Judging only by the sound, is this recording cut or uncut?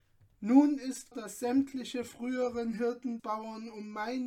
cut